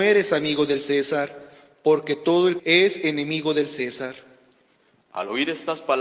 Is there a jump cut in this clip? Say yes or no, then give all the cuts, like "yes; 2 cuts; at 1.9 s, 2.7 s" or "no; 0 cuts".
yes; 1 cut; at 2.6 s